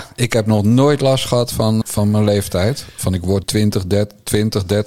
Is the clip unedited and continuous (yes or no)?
no